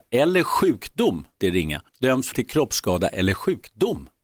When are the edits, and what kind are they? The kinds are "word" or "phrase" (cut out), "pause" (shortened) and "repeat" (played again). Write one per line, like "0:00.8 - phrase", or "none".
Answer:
0:01.4 - phrase
0:01.9 - pause
0:02.3 - word